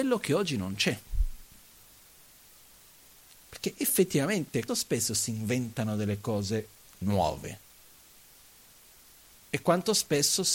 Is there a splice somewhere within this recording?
yes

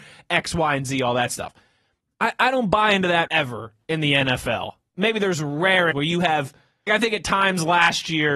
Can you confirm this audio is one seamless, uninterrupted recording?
no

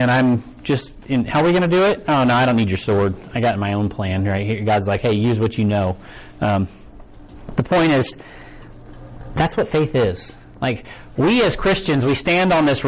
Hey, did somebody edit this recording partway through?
no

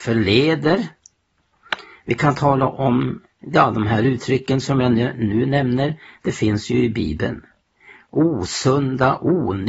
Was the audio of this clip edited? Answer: no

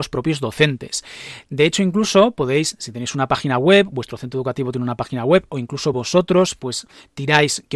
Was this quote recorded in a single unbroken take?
yes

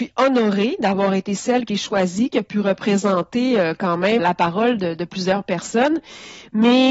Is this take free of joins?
no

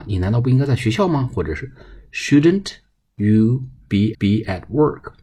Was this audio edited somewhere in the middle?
yes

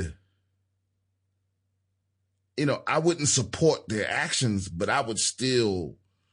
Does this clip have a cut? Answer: no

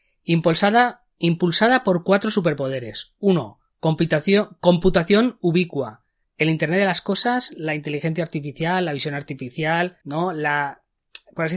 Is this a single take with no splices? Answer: no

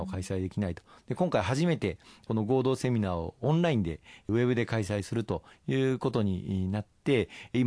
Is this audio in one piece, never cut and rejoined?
yes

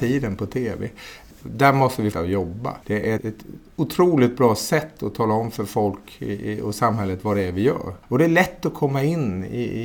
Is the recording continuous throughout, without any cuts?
no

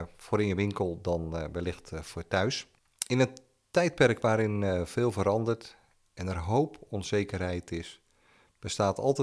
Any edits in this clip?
no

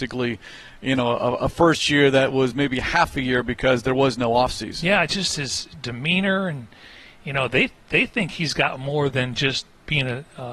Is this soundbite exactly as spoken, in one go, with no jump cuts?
yes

